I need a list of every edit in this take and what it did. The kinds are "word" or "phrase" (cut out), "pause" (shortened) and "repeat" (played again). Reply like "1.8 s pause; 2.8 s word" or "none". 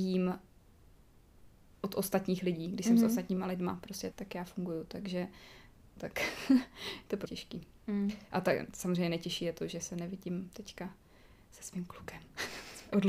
4.1 s word; 6.0 s phrase; 7.3 s word